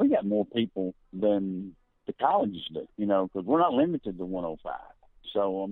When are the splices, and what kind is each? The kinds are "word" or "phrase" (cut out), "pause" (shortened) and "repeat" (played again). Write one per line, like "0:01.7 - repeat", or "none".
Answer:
0:01.0 - pause
0:02.9 - pause

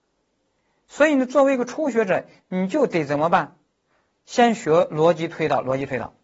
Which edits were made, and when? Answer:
none

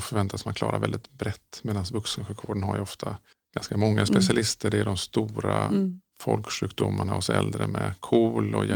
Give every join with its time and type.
0:03.3 - pause

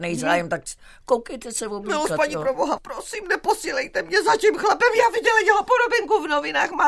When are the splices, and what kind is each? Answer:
0:02.8 - word

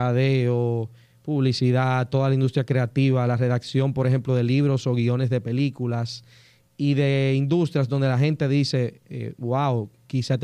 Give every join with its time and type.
none

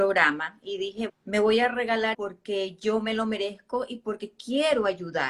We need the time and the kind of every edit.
0:01.1 - word
0:02.1 - word

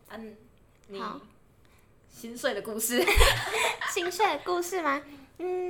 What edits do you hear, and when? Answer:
none

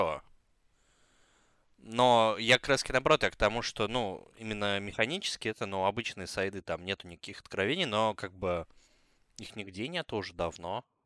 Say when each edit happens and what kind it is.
none

